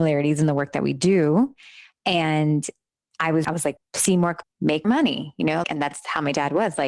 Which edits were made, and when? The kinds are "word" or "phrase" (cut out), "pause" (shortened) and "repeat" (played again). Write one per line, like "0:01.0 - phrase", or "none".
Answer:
0:03.4 - word
0:03.8 - word
0:04.4 - word
0:04.8 - word
0:05.6 - word